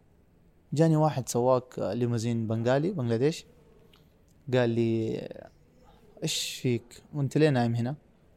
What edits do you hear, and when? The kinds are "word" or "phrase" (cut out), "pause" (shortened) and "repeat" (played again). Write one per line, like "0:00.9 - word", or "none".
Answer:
none